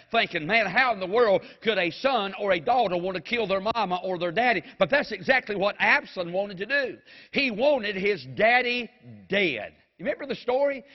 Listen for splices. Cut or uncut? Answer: uncut